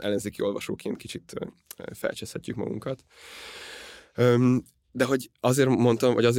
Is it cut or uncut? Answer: uncut